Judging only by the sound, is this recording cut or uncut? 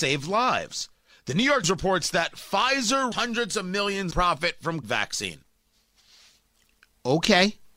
cut